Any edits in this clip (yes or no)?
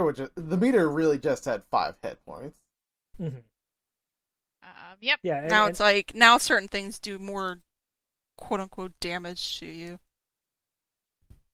no